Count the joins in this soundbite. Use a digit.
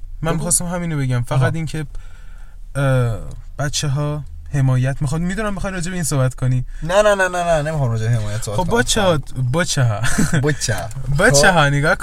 0